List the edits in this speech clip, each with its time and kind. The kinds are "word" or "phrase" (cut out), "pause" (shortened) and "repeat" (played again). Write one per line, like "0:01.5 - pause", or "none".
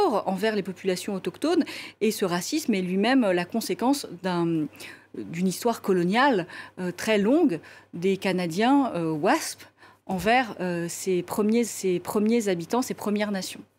0:11.7 - repeat